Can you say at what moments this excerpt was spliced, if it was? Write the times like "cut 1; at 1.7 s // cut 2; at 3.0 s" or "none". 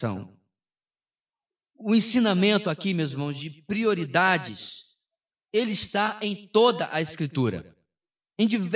none